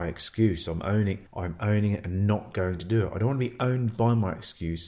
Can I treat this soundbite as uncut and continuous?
no; 1 cut; at 1.3 s

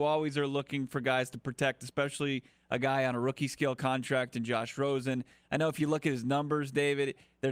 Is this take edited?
no; 0 cuts

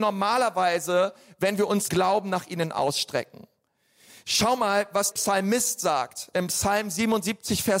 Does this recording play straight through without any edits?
no; 2 cuts; at 1.9 s, 5.1 s

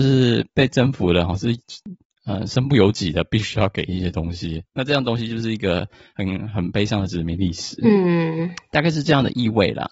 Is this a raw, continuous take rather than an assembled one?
yes; 0 cuts

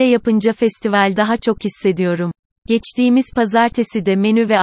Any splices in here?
yes; 1 cut; at 1.2 s

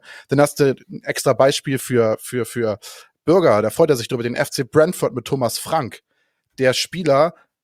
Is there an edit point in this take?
no; 0 cuts

